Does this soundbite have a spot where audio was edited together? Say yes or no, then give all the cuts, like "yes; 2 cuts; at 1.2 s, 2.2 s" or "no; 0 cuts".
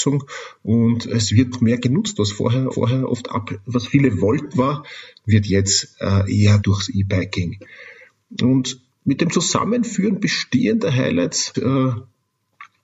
yes; 5 cuts; at 1.5 s, 2.7 s, 4.5 s, 6.6 s, 11.5 s